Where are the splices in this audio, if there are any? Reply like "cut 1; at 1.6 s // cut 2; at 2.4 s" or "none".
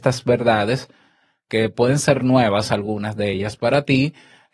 none